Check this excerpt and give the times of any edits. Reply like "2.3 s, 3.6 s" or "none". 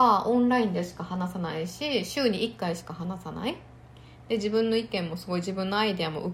none